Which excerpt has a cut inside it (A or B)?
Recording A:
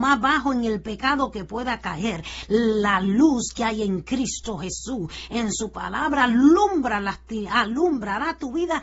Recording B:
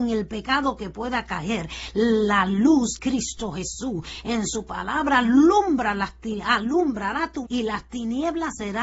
B